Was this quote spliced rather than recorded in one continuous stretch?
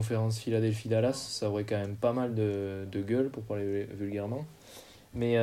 no; 0 cuts

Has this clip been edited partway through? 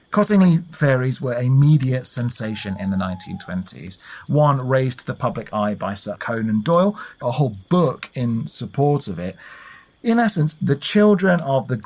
yes; 2 cuts; at 6.2 s, 7.2 s

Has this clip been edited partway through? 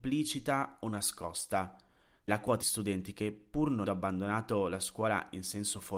yes; 3 cuts; at 2.3 s, 2.6 s, 3.8 s

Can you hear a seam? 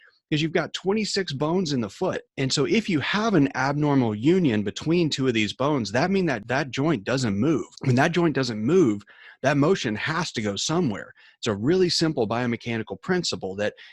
yes; 1 cut; at 2.3 s

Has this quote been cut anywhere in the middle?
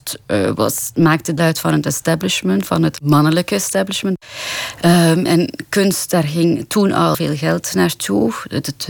yes; 3 cuts; at 1.4 s, 5.3 s, 7.1 s

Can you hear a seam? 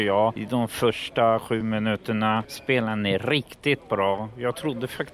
no; 0 cuts

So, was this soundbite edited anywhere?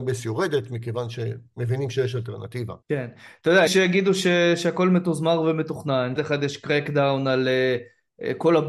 yes; 3 cuts; at 2.8 s, 3.7 s, 6.2 s

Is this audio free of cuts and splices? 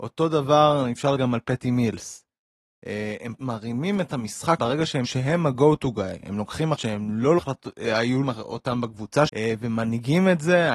no; 9 cuts; at 1.2 s, 3.4 s, 4.1 s, 4.6 s, 5.0 s, 6.7 s, 7.4 s, 8.2 s, 9.3 s

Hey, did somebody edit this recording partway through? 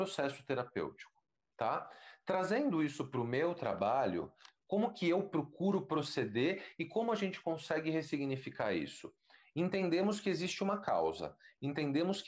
no; 0 cuts

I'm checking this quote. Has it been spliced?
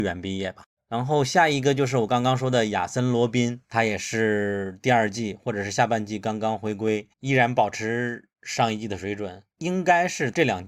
yes; 3 cuts; at 3.6 s, 7.1 s, 9.5 s

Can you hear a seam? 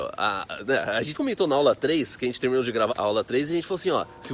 yes; 2 cuts; at 1.1 s, 2.9 s

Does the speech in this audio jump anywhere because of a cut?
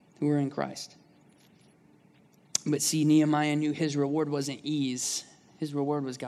no; 0 cuts

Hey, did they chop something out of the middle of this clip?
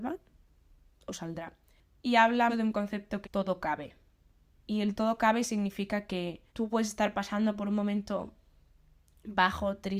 yes; 3 cuts; at 2.5 s, 3.2 s, 6.5 s

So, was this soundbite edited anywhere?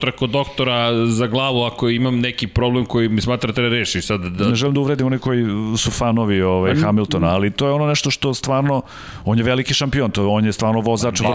no; 0 cuts

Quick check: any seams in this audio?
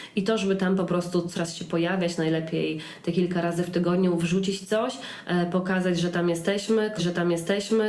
yes; 2 cuts; at 1.3 s, 7.0 s

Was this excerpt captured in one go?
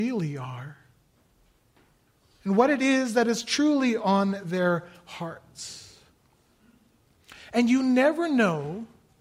yes; 0 cuts

